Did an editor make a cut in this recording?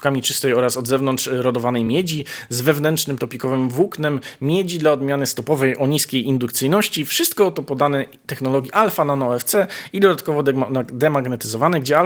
no; 0 cuts

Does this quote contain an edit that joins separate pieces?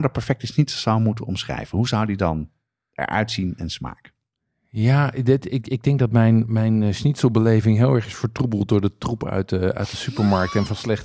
no; 0 cuts

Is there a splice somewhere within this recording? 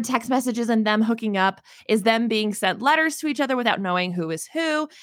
no; 0 cuts

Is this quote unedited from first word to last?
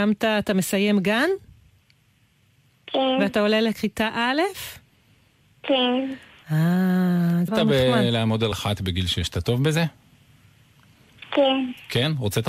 no; 2 cuts; at 7.5 s, 8.5 s

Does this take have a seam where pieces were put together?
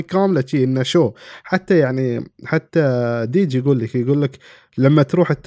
no; 0 cuts

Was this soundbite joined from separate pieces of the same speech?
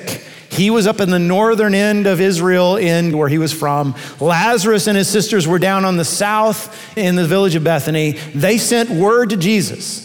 yes; 2 cuts; at 3.1 s, 7.0 s

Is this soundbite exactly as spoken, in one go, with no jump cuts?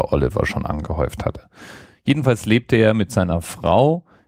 yes; 0 cuts

